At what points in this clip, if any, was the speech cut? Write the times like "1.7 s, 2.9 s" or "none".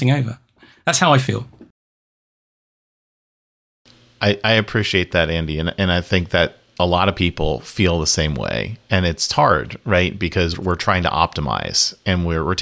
10.5 s